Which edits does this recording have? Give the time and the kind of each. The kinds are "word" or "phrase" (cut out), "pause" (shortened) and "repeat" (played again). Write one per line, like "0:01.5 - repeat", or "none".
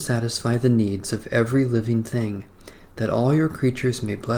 none